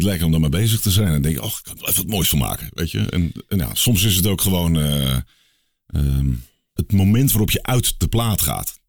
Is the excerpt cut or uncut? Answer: cut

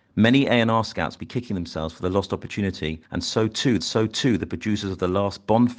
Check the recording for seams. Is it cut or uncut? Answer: cut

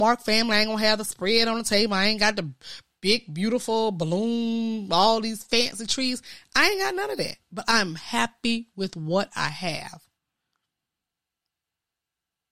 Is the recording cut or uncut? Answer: uncut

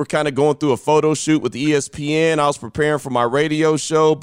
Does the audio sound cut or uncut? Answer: uncut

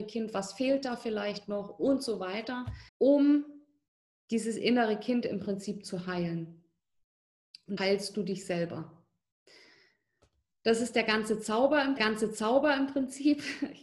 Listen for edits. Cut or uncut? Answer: cut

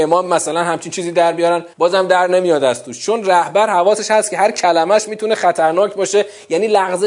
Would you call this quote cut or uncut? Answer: cut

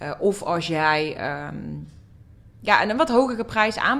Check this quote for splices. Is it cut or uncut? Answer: uncut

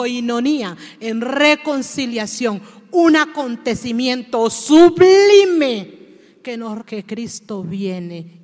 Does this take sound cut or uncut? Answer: cut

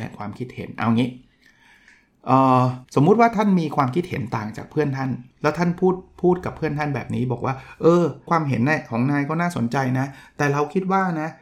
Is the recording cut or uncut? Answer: cut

